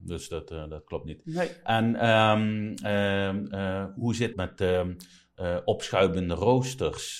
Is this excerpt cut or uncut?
cut